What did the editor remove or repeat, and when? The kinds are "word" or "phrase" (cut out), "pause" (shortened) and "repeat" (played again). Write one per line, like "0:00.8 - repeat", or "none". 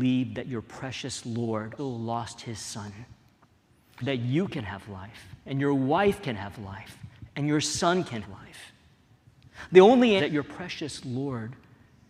0:01.8 - word
0:04.0 - word
0:05.4 - pause
0:08.2 - word
0:10.2 - phrase